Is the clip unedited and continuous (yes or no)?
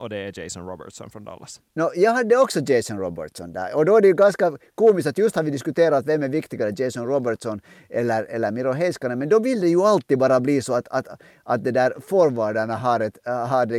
yes